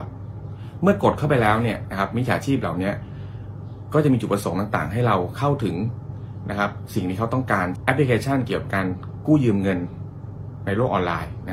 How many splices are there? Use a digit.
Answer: 1